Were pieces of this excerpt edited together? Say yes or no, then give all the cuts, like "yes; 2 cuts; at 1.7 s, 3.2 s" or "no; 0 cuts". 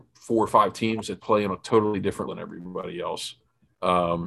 yes; 2 cuts; at 1.2 s, 2.3 s